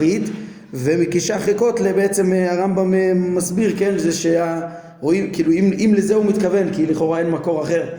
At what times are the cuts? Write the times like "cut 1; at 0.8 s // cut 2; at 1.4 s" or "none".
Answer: none